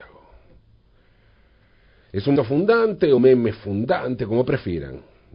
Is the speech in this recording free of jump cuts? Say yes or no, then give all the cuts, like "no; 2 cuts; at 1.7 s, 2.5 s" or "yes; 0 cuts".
no; 2 cuts; at 2.4 s, 3.2 s